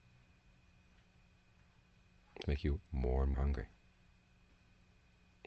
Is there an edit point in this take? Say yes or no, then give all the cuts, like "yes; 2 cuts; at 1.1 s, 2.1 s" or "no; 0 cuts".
yes; 2 cuts; at 2.4 s, 3.3 s